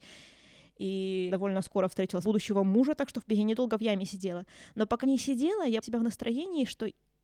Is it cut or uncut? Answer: cut